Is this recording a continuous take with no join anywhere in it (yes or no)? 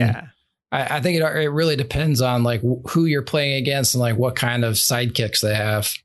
yes